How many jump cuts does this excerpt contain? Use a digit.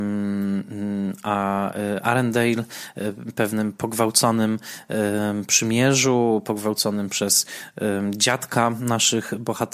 0